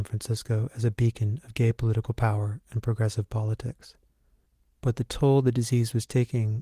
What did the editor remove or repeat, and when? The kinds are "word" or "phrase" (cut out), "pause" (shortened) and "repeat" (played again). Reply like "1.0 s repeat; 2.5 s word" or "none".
none